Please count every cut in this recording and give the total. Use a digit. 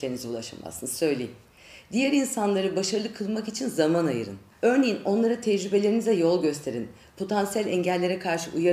1